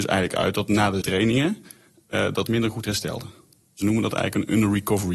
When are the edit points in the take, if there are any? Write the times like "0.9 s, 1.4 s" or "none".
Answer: 1.0 s, 2.5 s